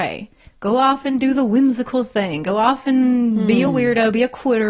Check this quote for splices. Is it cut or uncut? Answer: uncut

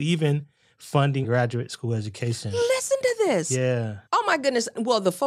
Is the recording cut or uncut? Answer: cut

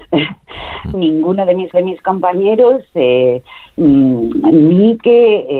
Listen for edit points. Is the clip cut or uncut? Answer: cut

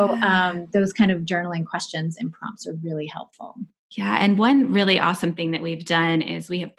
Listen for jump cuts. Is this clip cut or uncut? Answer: uncut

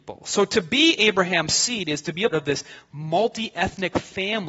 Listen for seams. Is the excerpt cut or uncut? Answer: cut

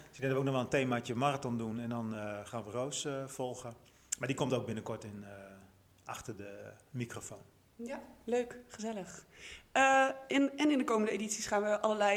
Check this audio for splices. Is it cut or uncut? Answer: uncut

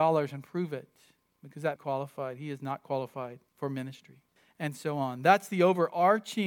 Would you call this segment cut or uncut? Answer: cut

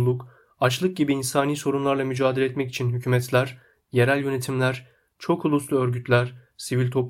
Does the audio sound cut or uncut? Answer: uncut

